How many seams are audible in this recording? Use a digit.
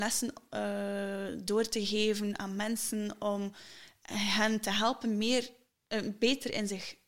0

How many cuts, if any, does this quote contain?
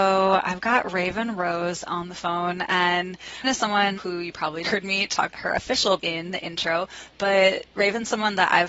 5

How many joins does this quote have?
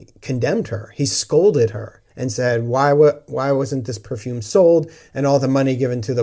1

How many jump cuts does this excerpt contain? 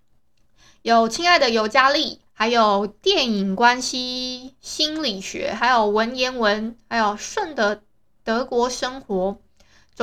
2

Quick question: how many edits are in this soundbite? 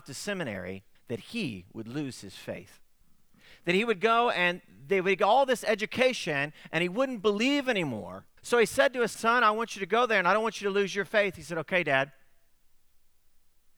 4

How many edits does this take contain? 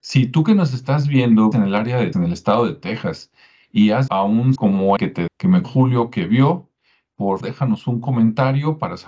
8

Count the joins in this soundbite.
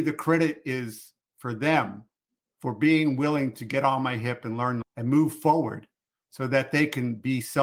1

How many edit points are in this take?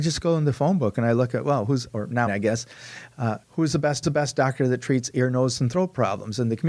3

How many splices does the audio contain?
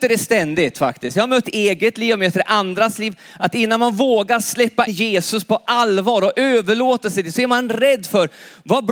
2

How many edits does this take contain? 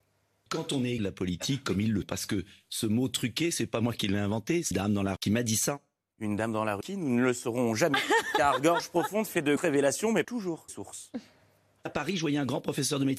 9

